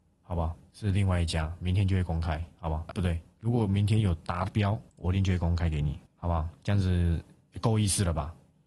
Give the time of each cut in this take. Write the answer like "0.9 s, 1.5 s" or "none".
2.9 s, 4.9 s, 6.1 s